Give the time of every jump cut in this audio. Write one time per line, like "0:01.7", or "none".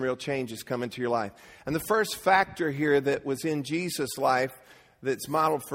none